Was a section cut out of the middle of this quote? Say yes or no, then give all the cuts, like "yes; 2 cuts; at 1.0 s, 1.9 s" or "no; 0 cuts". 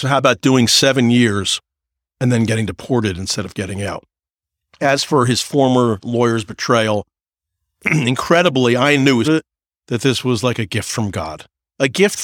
yes; 1 cut; at 9.2 s